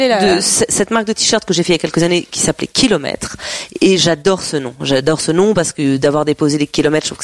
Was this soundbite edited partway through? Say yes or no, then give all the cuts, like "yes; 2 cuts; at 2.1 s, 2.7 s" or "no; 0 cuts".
no; 0 cuts